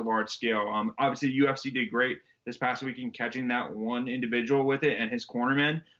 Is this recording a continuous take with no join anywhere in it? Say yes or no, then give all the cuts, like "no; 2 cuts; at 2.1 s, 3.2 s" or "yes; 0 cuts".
yes; 0 cuts